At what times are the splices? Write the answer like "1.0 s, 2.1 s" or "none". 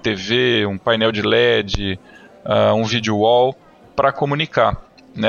none